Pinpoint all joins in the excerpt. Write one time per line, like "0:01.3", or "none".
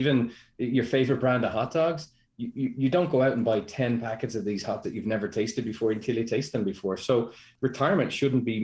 0:02.7
0:04.8